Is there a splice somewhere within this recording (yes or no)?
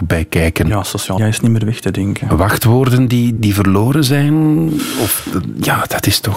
yes